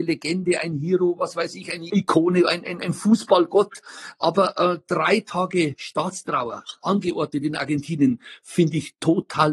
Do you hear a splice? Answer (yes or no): no